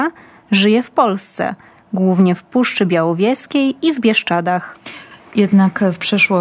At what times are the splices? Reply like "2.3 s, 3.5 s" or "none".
none